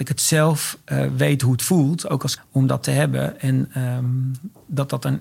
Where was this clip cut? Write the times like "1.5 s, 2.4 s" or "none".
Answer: 2.4 s